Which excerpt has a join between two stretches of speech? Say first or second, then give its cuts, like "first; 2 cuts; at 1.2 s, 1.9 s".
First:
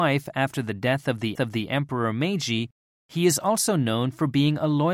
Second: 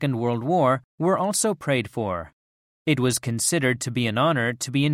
first; 1 cut; at 1.4 s